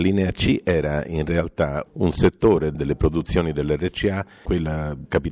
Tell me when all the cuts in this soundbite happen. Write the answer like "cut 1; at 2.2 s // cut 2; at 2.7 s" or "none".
none